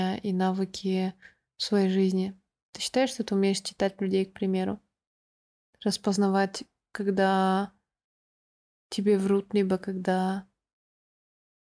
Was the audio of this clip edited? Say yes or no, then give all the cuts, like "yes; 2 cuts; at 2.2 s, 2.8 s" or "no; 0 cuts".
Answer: no; 0 cuts